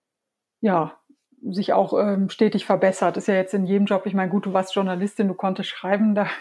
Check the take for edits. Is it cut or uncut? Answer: uncut